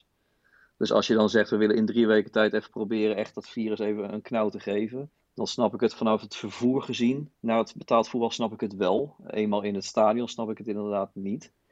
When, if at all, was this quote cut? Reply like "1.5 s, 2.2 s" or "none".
5.2 s, 7.3 s